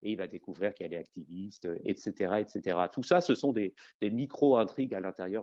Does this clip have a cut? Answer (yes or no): no